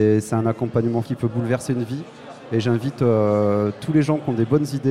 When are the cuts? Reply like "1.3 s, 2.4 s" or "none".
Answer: 1.0 s